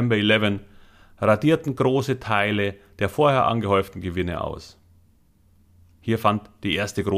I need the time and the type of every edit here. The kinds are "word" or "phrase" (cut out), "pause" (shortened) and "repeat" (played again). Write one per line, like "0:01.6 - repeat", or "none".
none